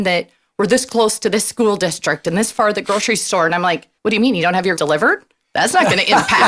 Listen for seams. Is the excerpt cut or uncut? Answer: cut